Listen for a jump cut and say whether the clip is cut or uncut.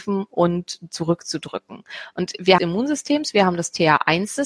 cut